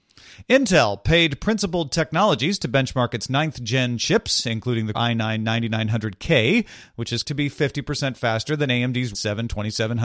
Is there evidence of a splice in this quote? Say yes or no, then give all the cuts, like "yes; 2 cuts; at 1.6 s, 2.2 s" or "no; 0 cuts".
yes; 3 cuts; at 4.9 s, 7.2 s, 9.1 s